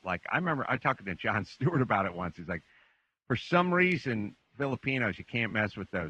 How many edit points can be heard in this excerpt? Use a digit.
0